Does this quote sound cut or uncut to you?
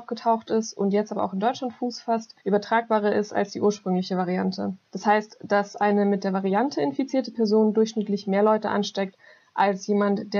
cut